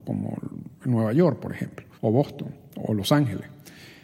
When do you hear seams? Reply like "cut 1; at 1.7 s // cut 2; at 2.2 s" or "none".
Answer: cut 1; at 1.9 s